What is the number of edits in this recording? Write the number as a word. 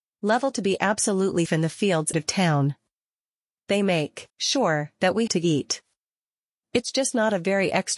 four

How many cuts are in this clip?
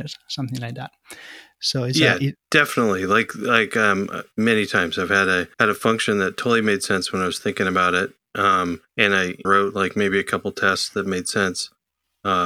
four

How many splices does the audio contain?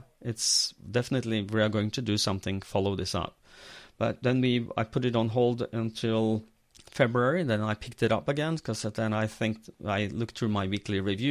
one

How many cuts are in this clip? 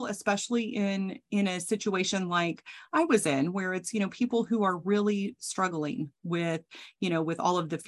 zero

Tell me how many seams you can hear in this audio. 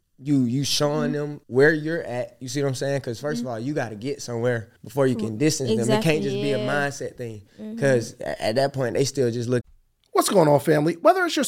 two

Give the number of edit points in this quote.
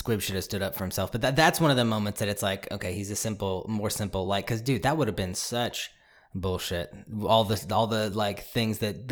zero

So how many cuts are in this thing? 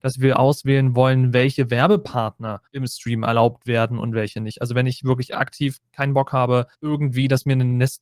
two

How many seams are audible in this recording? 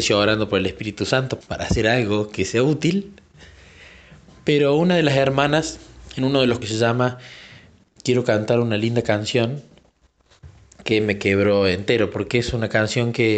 two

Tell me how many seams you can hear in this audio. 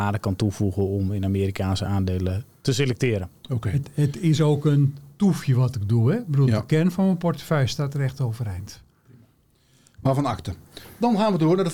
zero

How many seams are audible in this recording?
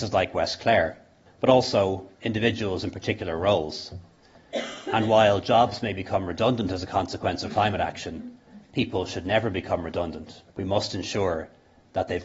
three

